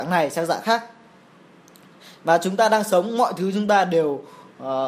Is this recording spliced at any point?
no; 0 cuts

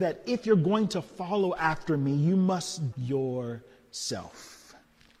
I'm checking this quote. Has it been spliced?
yes; 1 cut; at 2.9 s

